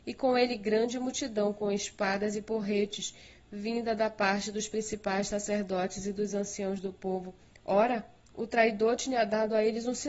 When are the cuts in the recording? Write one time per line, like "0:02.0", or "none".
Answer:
0:07.4